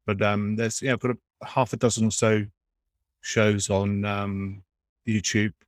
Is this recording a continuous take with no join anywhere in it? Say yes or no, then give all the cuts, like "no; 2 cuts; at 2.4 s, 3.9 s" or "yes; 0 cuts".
yes; 0 cuts